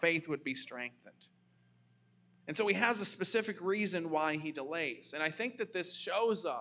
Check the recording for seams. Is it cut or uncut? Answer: uncut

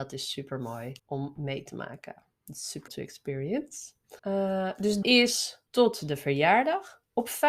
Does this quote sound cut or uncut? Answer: cut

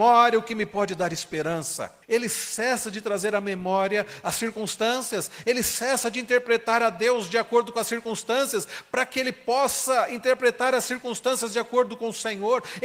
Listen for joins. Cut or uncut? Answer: cut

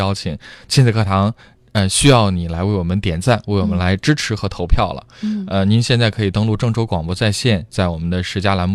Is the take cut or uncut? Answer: uncut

